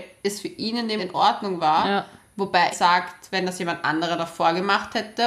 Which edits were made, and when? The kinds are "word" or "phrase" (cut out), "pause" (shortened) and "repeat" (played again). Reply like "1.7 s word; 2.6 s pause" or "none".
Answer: 1.0 s word; 2.7 s word